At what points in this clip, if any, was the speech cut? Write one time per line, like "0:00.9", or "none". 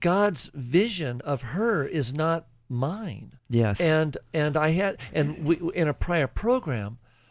0:03.4